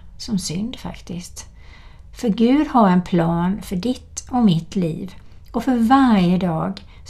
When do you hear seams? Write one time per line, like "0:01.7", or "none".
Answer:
none